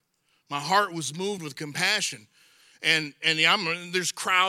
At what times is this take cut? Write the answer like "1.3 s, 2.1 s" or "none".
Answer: none